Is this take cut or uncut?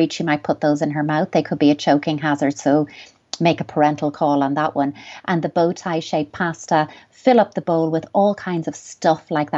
uncut